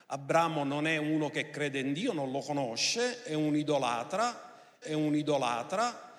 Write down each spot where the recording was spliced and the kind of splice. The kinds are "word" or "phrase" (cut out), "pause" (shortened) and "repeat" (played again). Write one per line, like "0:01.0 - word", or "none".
0:04.8 - repeat